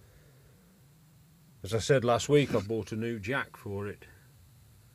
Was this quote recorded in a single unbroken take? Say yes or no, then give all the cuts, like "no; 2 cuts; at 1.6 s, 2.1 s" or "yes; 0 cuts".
yes; 0 cuts